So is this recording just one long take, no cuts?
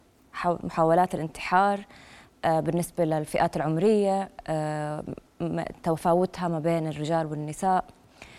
yes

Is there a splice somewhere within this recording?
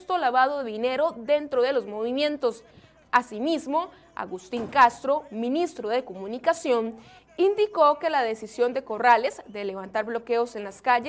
no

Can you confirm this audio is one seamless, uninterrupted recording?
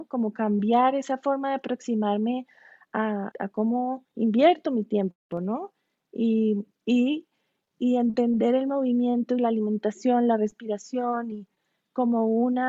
no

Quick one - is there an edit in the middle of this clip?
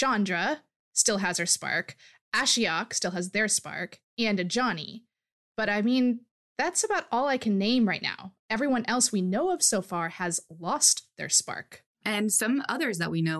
no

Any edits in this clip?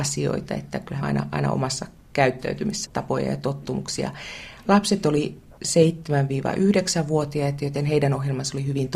yes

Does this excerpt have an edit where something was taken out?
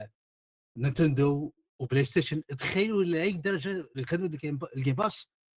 no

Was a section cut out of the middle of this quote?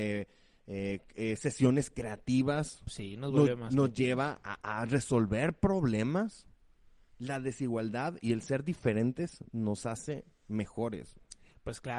no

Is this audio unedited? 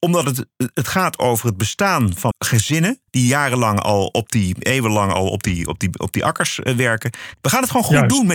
no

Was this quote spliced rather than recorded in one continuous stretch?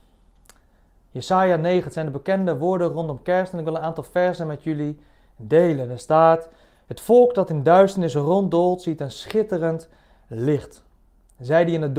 no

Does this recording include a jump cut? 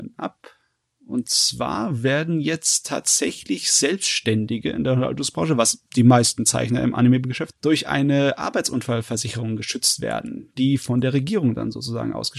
yes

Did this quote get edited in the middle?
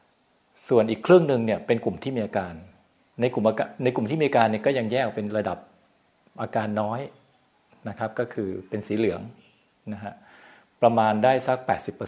no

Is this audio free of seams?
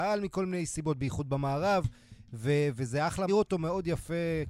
no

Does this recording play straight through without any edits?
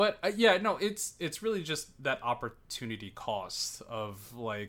no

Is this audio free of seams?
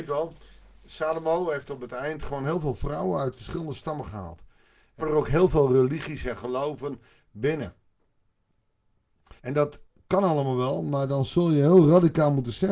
no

